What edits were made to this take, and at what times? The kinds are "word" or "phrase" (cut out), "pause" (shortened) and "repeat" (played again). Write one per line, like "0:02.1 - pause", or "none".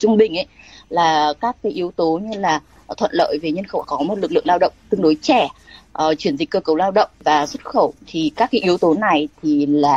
0:03.8 - word
0:07.1 - pause
0:08.0 - pause